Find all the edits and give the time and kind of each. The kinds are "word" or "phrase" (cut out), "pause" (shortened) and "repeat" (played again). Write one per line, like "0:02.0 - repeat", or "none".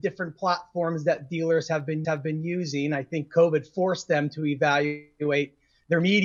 0:02.0 - repeat